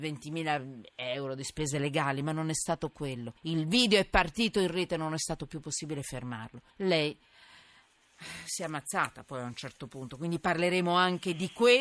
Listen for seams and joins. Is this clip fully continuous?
no; 2 cuts; at 3.4 s, 6.7 s

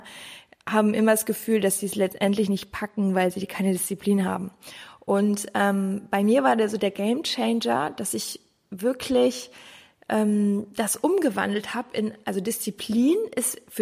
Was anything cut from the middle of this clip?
no; 0 cuts

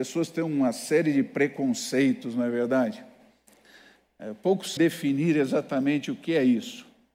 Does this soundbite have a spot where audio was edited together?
yes; 1 cut; at 4.8 s

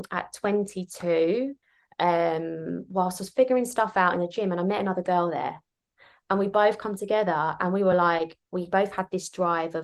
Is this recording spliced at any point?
no; 0 cuts

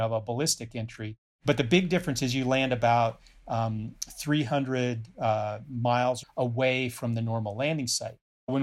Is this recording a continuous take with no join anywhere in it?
no; 1 cut; at 6.2 s

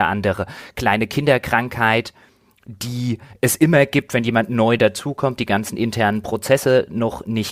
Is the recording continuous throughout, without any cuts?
yes; 0 cuts

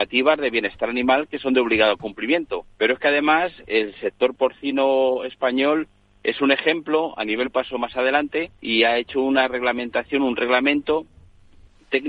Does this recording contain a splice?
yes; 3 cuts; at 2.7 s, 7.4 s, 8.6 s

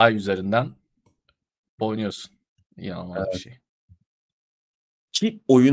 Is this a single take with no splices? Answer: no; 1 cut; at 1.8 s

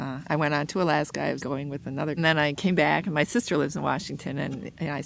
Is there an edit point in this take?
yes; 2 cuts; at 1.4 s, 2.2 s

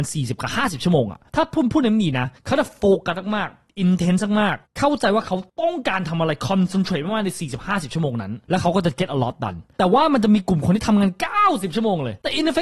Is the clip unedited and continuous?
yes; 0 cuts

